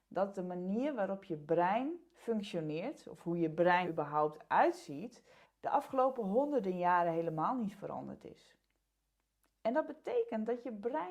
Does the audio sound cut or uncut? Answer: cut